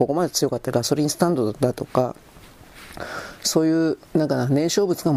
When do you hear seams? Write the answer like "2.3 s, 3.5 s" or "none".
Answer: 4.1 s